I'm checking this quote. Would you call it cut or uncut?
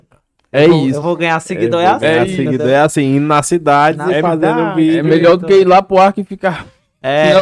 uncut